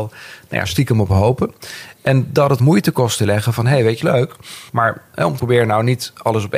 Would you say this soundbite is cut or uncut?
cut